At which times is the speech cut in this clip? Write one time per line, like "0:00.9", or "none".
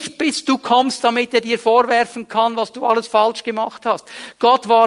none